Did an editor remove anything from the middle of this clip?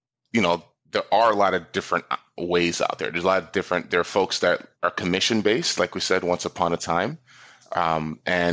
yes; 1 cut; at 4.8 s

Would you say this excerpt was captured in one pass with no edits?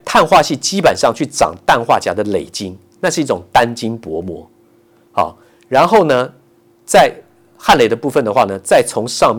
yes; 0 cuts

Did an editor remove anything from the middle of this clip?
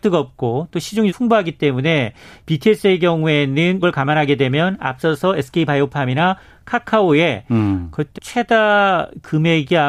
yes; 3 cuts; at 1.1 s, 3.8 s, 8.1 s

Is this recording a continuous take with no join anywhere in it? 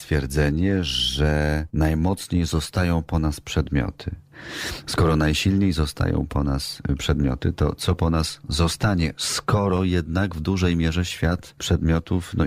yes; 0 cuts

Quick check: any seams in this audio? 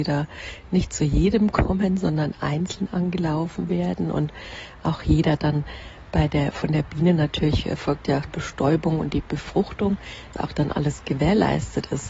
yes; 2 cuts; at 8.3 s, 10.3 s

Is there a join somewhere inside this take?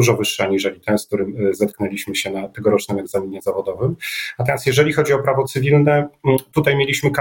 no; 0 cuts

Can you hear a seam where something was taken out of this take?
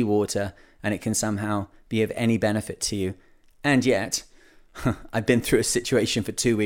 no; 0 cuts

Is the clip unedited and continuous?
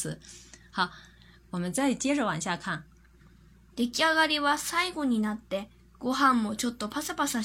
yes; 0 cuts

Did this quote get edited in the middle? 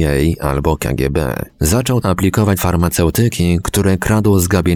yes; 2 cuts; at 2.0 s, 2.6 s

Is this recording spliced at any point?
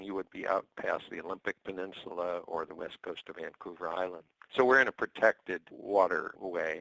no; 0 cuts

